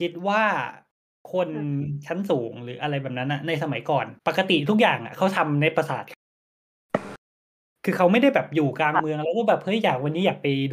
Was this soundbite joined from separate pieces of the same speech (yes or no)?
yes